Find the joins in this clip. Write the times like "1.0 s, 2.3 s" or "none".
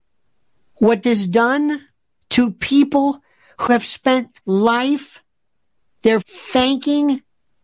1.0 s, 3.7 s, 4.4 s, 6.2 s

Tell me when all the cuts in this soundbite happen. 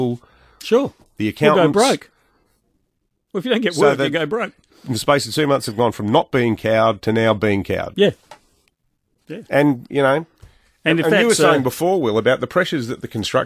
none

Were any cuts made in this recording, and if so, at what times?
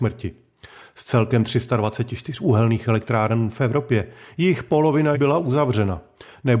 5.1 s

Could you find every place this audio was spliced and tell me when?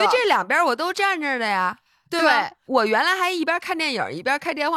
none

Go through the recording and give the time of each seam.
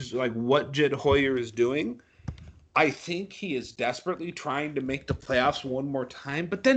none

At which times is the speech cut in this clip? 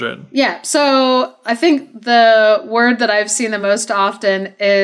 none

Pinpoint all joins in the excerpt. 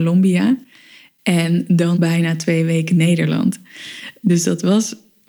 1.9 s

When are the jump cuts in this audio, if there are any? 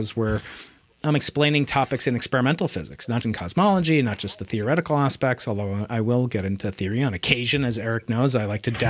3.2 s

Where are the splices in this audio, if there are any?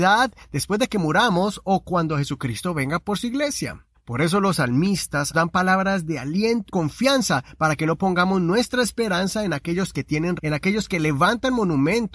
3.9 s, 5.3 s, 6.7 s, 10.4 s

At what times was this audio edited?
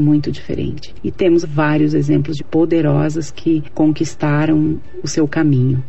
1.4 s, 2.4 s

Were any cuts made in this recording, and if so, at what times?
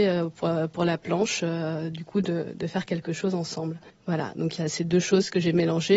3.9 s

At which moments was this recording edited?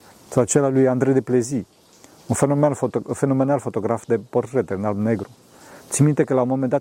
none

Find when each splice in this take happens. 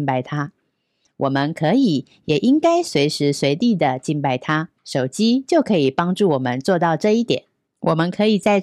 4.8 s, 7.7 s

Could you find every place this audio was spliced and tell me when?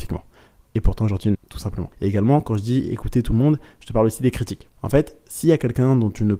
1.3 s, 1.9 s

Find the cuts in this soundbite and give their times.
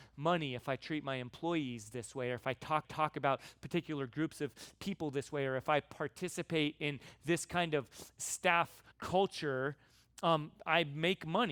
2.8 s, 8.9 s

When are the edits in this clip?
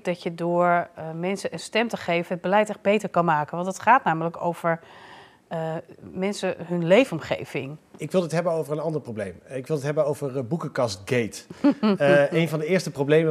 none

